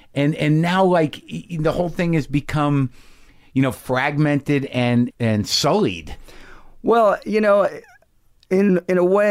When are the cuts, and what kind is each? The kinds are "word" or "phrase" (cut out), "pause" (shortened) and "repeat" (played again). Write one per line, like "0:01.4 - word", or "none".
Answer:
0:05.1 - word